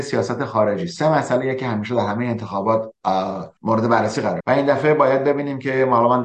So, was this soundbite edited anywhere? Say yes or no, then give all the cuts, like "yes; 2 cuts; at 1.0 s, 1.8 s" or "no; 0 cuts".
yes; 2 cuts; at 3.6 s, 4.4 s